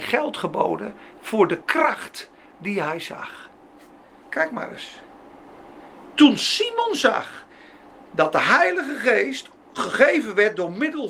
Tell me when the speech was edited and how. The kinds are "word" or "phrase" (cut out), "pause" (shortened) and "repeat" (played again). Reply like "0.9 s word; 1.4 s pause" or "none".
none

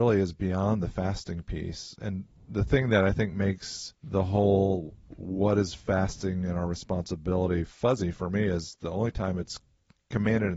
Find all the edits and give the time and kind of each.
4.0 s pause

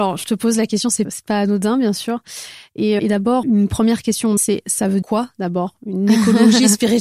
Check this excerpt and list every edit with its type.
1.0 s word; 3.0 s word; 3.4 s word; 4.4 s word; 5.0 s word

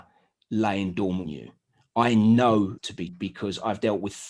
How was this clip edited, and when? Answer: 1.3 s word; 2.8 s word; 3.1 s word

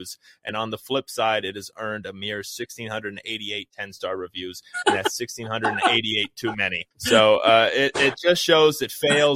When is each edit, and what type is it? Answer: 6.9 s pause

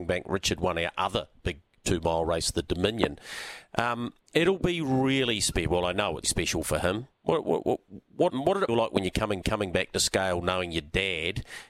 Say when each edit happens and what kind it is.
4.2 s pause; 6.2 s word; 7.1 s pause; 8.3 s word; 8.7 s phrase; 9.4 s repeat

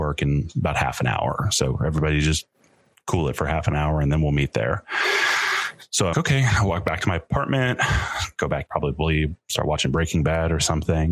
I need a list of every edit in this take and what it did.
6.1 s word; 8.7 s word

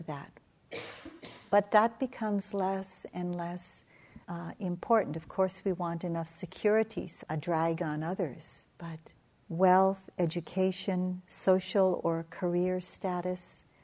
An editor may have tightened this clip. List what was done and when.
4.2 s pause; 7.2 s phrase; 9.2 s pause

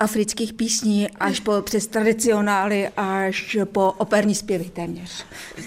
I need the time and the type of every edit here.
none

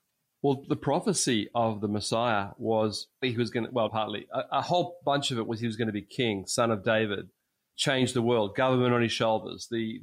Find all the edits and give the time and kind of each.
3.2 s word; 3.9 s word; 7.7 s word

